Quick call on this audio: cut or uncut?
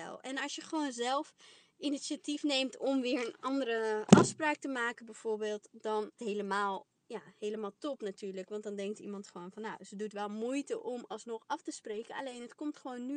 cut